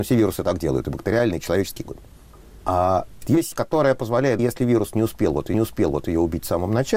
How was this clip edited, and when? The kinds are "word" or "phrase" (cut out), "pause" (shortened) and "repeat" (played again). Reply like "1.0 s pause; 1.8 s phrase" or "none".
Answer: 1.8 s word; 3.2 s word; 3.5 s word; 4.4 s word; 5.5 s repeat